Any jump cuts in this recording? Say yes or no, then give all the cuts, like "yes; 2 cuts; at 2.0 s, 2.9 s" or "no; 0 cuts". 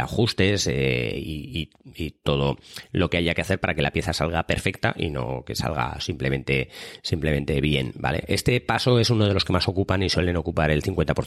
no; 0 cuts